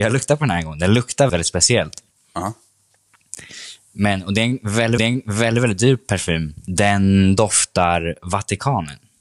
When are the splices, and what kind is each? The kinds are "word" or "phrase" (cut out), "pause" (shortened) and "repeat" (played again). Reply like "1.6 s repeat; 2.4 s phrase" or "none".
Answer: 1.3 s word; 5.0 s repeat